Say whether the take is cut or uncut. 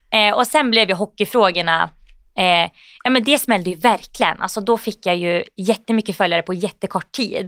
uncut